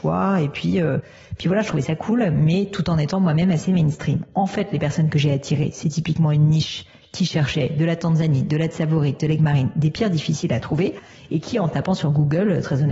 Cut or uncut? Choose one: uncut